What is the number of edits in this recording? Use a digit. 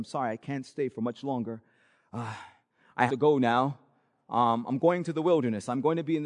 1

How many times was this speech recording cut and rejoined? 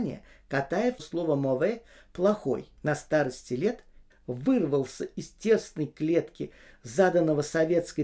3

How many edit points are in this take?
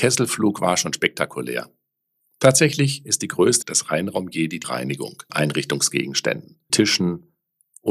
4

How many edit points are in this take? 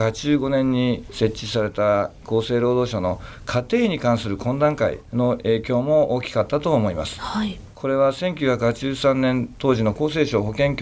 0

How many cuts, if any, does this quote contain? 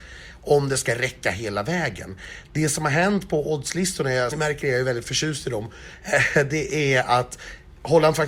1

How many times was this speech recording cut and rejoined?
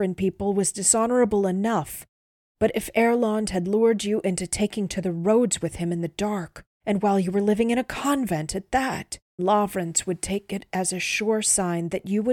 2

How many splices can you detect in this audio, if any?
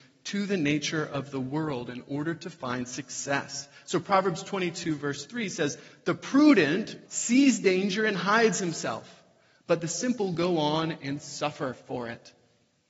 1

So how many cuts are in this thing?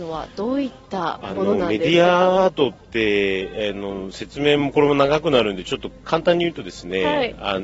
1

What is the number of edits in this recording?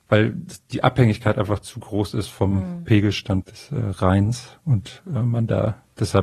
1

